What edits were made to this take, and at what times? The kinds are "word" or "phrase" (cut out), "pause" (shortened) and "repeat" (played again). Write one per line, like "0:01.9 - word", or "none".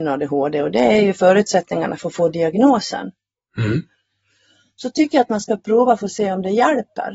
none